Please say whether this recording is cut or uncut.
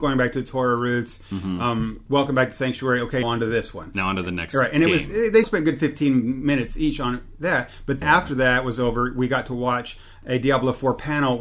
cut